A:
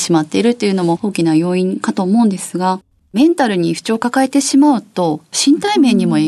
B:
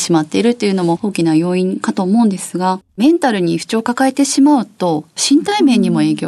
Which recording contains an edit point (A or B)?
B